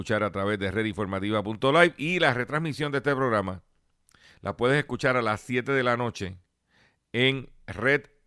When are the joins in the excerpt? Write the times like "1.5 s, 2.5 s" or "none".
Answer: none